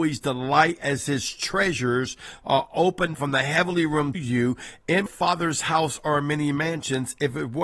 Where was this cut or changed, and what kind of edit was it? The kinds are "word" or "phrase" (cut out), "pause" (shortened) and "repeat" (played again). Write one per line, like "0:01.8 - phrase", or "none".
0:03.1 - word
0:04.1 - word
0:05.1 - word